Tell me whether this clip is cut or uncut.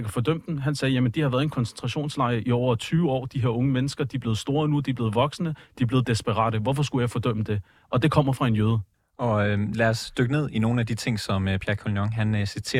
uncut